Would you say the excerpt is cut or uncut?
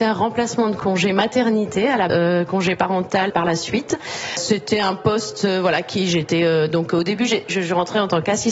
cut